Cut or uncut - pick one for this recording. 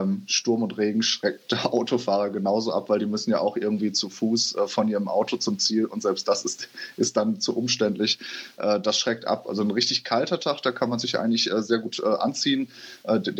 uncut